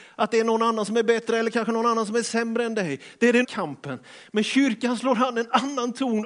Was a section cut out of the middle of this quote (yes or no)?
yes